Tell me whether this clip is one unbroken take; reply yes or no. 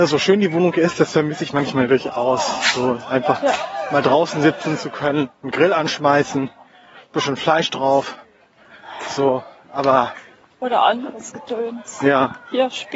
yes